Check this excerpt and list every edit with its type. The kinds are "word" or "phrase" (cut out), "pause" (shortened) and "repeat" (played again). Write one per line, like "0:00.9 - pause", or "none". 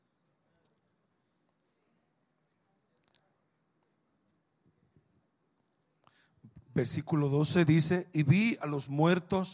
none